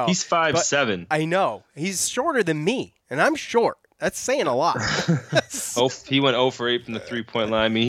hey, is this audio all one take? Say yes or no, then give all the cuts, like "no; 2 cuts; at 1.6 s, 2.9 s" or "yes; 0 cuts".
no; 1 cut; at 3.0 s